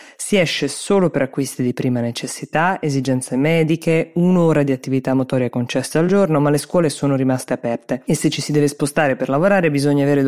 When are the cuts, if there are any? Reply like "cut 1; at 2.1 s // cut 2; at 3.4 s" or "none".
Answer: none